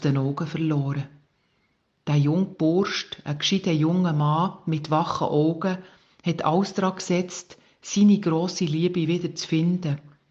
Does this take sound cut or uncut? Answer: uncut